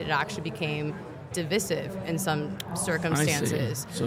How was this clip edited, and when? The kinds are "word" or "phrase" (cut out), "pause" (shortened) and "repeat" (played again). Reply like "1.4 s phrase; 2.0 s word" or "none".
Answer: 1.3 s word